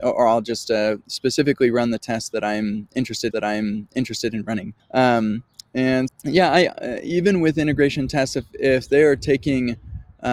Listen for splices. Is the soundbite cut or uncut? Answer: cut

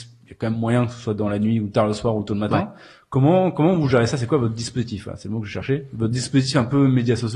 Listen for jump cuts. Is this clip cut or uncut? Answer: uncut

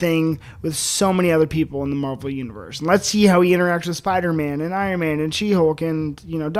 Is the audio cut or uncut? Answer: uncut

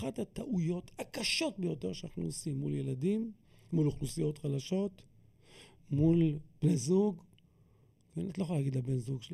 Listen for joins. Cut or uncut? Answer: uncut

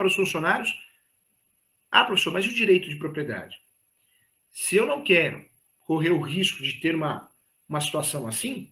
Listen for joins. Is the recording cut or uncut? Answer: uncut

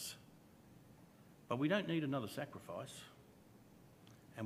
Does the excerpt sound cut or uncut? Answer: uncut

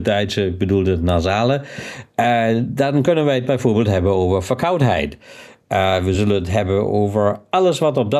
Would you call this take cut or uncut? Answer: uncut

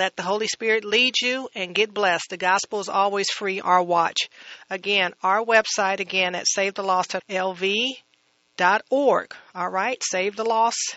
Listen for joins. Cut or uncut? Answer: cut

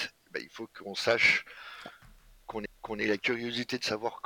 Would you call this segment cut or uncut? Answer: cut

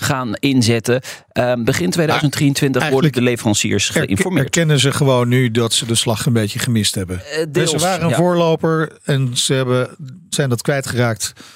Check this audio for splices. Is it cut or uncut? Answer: uncut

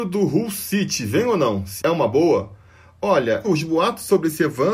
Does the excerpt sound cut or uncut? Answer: cut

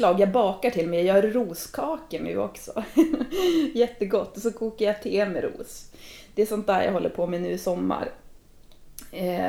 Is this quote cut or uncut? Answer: uncut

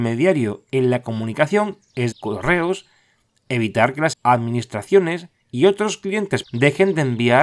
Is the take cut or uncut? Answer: cut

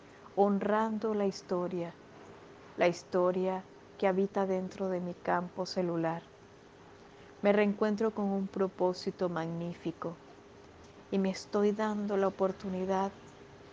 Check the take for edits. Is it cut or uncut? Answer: uncut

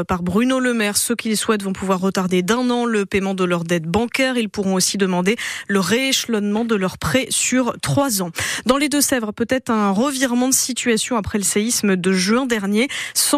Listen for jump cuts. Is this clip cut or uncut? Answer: uncut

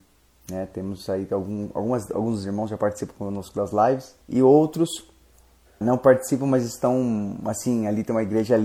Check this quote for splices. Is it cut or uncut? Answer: cut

